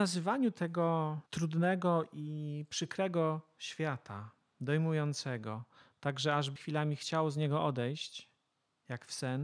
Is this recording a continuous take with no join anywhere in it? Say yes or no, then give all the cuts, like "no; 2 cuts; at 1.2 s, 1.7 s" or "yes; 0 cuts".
no; 2 cuts; at 1.3 s, 6.6 s